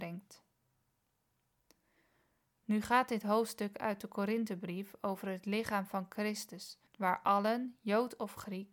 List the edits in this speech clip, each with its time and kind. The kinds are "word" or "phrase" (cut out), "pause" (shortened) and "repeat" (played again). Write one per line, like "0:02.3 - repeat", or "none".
0:06.9 - pause